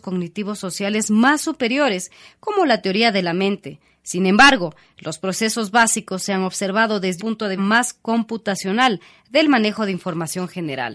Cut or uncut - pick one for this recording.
cut